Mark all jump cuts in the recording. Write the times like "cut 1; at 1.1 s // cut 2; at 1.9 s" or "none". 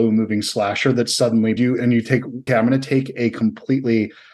cut 1; at 1.6 s // cut 2; at 2.5 s